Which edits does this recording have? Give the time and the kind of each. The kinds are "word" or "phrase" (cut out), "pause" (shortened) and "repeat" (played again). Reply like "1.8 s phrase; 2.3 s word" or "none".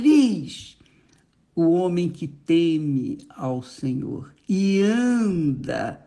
none

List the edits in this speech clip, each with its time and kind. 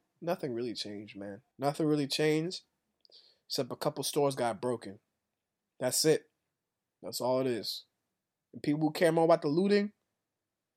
1.5 s pause

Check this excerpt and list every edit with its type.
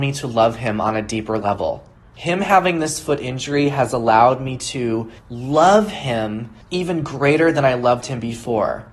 2.0 s pause; 5.2 s pause; 6.6 s pause

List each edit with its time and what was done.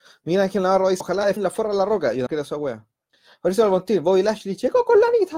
1.0 s word; 1.4 s word; 2.3 s word; 3.1 s pause

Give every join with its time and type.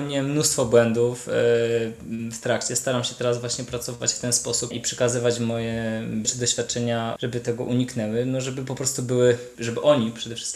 4.7 s word; 6.2 s word; 7.2 s phrase

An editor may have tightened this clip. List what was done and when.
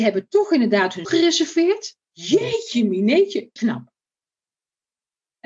1.0 s word; 2.0 s pause; 3.6 s phrase

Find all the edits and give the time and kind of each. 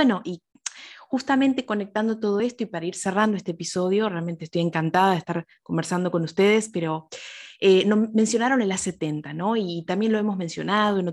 none

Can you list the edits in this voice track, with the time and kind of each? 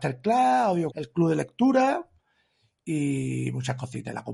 0.9 s word

